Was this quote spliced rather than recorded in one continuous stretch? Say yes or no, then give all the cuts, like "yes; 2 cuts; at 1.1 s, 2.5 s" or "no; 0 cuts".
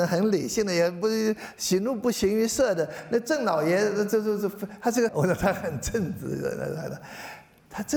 yes; 1 cut; at 5.1 s